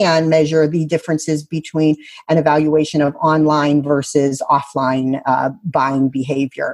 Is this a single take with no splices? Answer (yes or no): yes